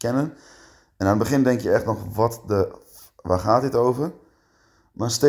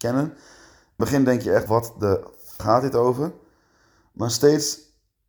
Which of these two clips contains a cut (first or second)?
second